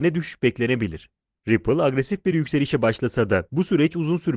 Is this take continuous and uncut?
yes; 0 cuts

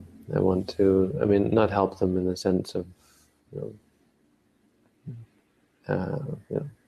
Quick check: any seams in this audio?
no; 0 cuts

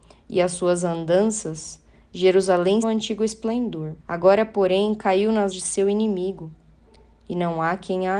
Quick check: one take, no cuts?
no; 3 cuts; at 2.8 s, 4.0 s, 5.5 s

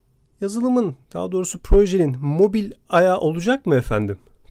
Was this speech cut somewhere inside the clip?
yes; 1 cut; at 1.0 s

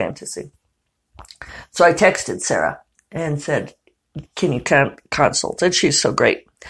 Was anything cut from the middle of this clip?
no; 0 cuts

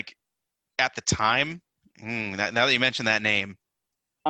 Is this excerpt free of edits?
yes; 0 cuts

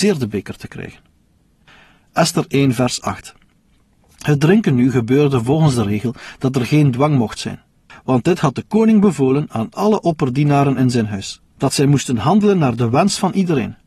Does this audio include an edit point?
no; 0 cuts

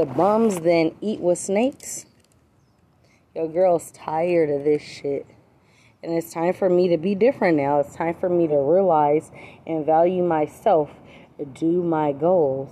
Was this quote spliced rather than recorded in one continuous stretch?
no; 0 cuts

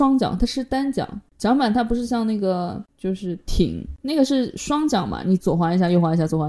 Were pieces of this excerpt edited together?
no; 0 cuts

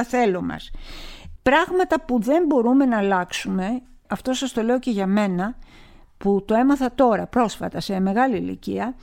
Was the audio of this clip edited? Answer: no; 0 cuts

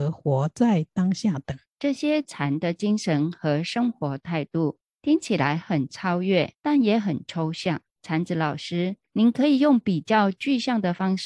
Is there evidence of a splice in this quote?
yes; 2 cuts; at 1.7 s, 7.9 s

